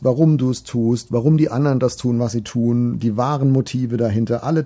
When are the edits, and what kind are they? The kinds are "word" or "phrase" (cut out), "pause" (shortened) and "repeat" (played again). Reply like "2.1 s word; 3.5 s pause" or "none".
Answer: none